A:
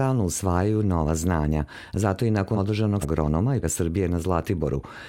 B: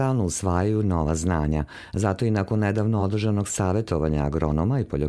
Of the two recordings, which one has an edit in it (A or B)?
A